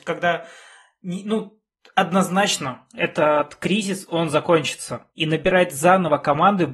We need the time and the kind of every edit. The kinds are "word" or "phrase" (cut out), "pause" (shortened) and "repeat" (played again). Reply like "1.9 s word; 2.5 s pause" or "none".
5.1 s pause